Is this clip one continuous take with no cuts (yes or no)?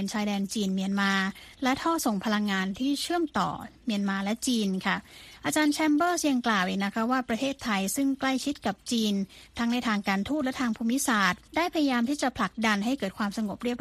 no